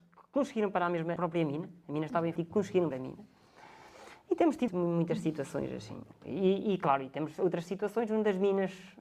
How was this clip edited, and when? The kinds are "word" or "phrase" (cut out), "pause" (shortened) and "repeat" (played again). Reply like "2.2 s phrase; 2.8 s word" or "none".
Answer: 1.2 s word; 2.4 s word; 2.9 s word; 4.7 s word